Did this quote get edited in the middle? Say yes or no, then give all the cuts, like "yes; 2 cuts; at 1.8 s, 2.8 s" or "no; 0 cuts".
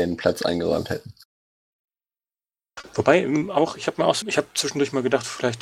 yes; 1 cut; at 4.2 s